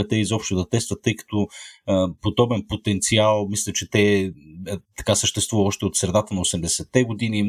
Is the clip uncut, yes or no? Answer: yes